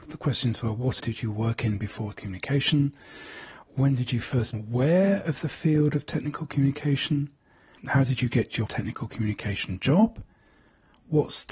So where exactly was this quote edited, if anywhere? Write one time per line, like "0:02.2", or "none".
0:01.0
0:02.1
0:04.5
0:08.7